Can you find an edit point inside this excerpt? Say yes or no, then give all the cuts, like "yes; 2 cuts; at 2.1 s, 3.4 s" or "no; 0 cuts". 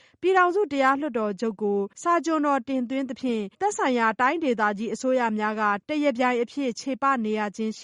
yes; 2 cuts; at 1.9 s, 3.5 s